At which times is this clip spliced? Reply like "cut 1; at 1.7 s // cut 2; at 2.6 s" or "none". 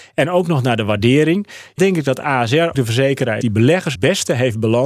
cut 1; at 1.8 s // cut 2; at 2.7 s // cut 3; at 3.4 s // cut 4; at 3.9 s